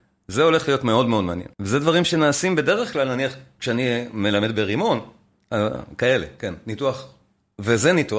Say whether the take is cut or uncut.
cut